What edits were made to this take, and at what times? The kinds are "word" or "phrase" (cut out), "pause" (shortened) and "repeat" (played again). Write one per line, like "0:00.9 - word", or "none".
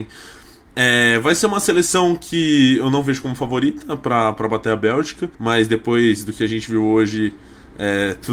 0:05.3 - pause